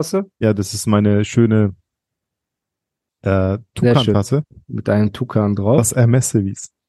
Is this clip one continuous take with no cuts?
yes; 0 cuts

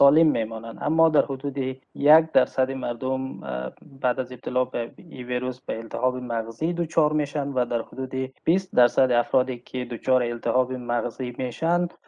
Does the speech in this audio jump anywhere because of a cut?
yes; 2 cuts; at 1.8 s, 8.4 s

